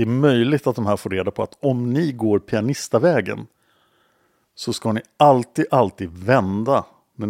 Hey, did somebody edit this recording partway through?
no; 0 cuts

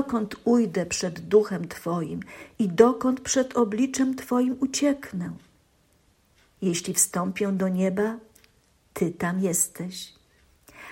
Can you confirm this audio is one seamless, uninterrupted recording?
yes; 0 cuts

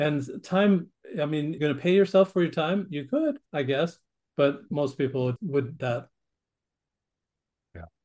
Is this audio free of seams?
no; 3 cuts; at 1.6 s, 5.4 s, 5.8 s

